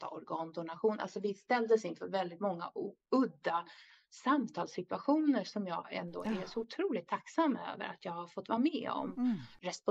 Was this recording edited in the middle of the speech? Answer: no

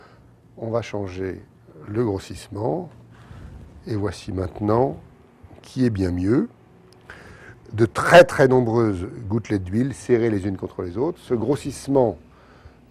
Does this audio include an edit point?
yes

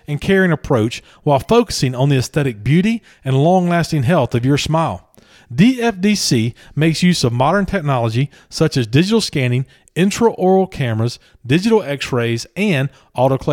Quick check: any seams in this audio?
no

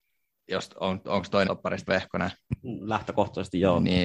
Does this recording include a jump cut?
yes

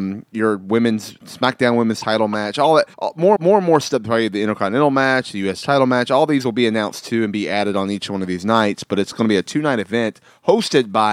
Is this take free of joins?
no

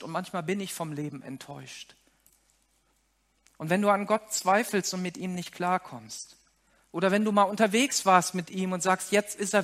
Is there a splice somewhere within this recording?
no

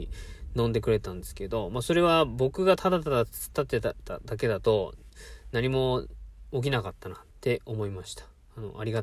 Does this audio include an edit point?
yes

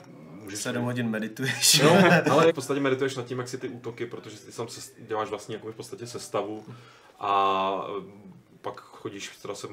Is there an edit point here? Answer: yes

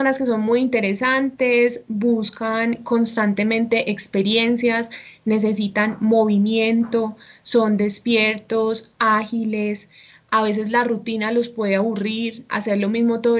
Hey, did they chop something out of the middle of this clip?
no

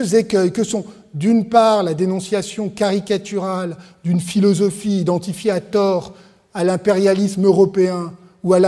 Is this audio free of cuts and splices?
yes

